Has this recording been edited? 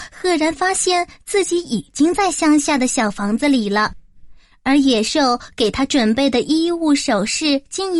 no; 0 cuts

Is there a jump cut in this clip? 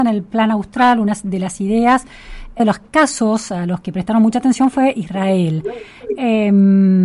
yes; 1 cut; at 2.6 s

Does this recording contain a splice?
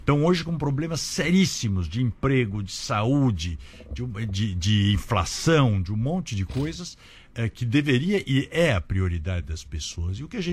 no; 0 cuts

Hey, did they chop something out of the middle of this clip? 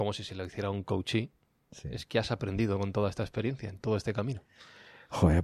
no; 0 cuts

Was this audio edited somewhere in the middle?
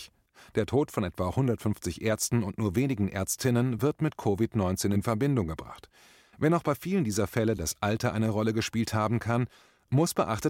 no; 0 cuts

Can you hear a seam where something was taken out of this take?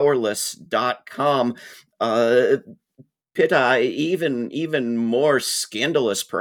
no; 0 cuts

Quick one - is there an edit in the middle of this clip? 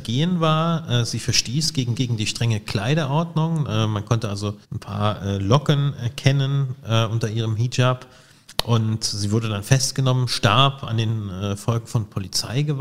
yes; 2 cuts; at 1.9 s, 4.6 s

